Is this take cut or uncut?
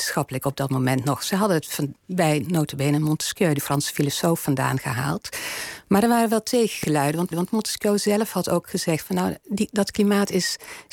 cut